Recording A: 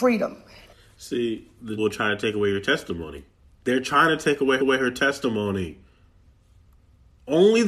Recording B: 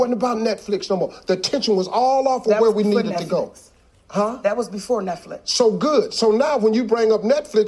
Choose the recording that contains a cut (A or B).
A